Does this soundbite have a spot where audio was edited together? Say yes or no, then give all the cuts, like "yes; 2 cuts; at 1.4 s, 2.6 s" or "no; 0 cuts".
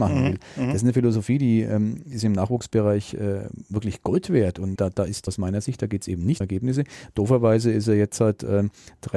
yes; 3 cuts; at 4.8 s, 5.3 s, 6.4 s